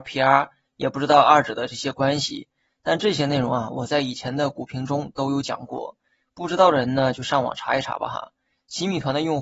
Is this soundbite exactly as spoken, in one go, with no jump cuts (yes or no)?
yes